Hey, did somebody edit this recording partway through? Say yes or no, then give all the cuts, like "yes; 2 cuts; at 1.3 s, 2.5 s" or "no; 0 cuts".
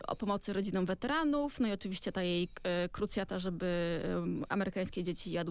no; 0 cuts